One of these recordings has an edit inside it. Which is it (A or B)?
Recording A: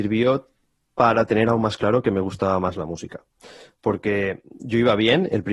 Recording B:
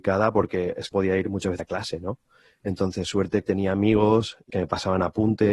B